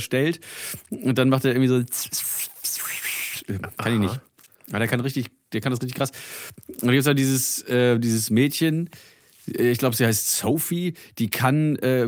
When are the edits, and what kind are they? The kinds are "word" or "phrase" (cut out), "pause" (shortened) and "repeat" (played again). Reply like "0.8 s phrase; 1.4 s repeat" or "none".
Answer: none